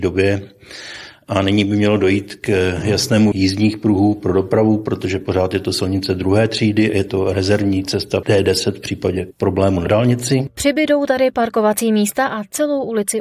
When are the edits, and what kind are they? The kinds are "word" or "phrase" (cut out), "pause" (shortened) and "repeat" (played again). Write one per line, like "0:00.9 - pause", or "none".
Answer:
0:03.3 - word
0:08.2 - word